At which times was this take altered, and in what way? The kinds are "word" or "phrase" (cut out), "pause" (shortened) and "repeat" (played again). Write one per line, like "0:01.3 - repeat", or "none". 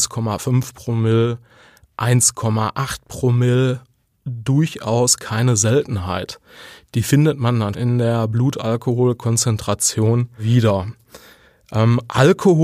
0:07.7 - word